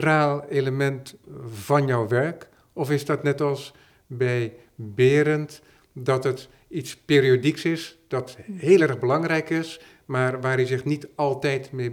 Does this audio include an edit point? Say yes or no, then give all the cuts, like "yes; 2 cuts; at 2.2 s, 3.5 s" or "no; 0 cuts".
no; 0 cuts